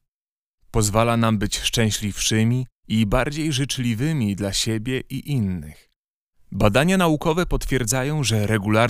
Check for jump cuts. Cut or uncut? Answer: uncut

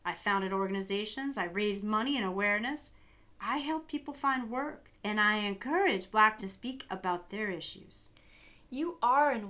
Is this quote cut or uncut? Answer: cut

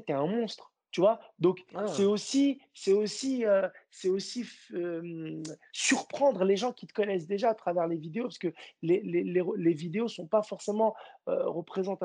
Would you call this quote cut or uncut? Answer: uncut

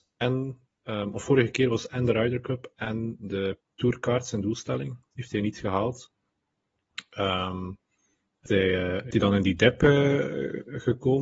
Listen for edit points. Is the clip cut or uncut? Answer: cut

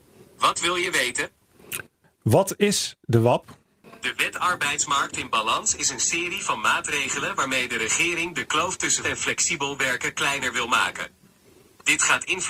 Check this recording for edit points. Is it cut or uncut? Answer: cut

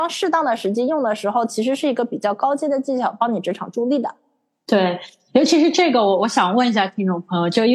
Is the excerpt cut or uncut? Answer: uncut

